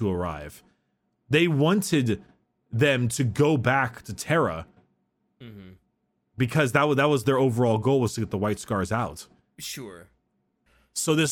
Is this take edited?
no; 0 cuts

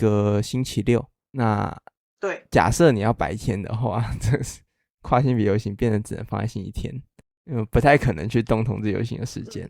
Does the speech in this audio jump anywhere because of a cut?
no; 0 cuts

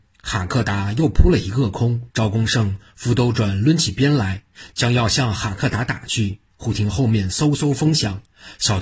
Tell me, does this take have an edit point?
yes; 1 cut; at 2.1 s

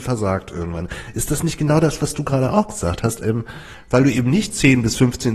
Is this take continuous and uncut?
yes; 0 cuts

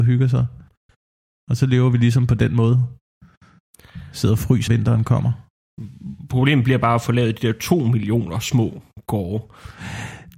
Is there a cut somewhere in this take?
yes; 1 cut; at 4.7 s

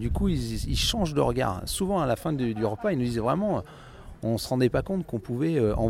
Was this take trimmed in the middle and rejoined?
no; 0 cuts

